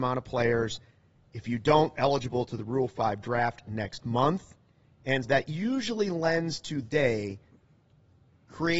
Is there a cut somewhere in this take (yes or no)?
yes